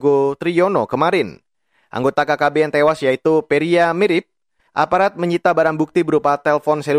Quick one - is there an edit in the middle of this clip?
no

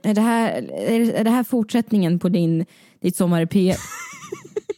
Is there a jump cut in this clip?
no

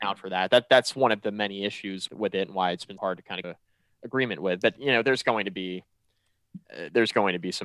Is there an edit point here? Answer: yes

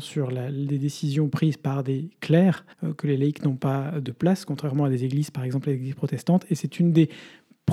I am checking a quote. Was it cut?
yes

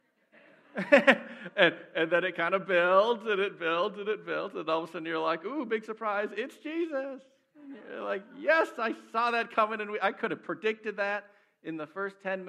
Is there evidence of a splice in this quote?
no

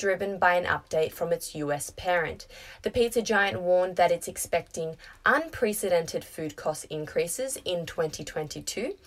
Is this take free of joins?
yes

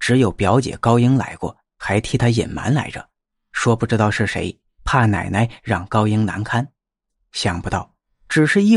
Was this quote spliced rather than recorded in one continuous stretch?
no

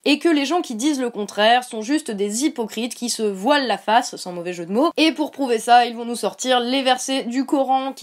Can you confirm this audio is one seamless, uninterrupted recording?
yes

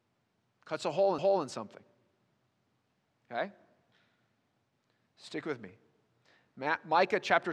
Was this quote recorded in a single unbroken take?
no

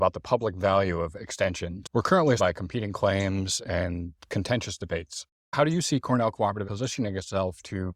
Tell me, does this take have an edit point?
yes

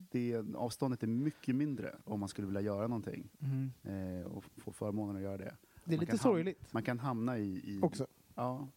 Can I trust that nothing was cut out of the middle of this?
yes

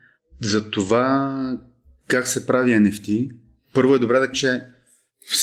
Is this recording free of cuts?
no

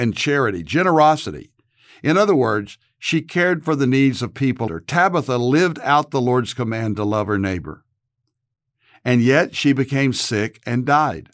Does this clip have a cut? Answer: yes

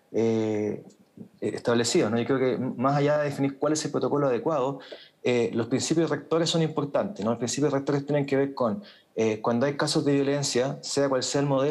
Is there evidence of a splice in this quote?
no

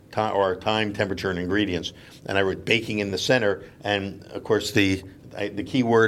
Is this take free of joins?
yes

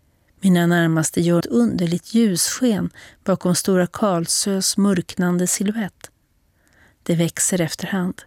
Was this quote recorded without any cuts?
no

